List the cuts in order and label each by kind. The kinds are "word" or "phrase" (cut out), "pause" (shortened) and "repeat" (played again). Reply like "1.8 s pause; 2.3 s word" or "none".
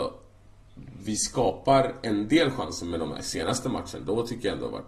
none